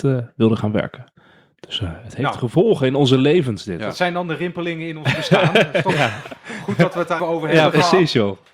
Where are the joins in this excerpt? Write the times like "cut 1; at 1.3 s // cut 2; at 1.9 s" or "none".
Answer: cut 1; at 7.2 s